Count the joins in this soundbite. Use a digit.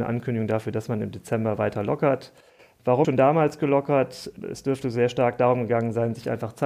1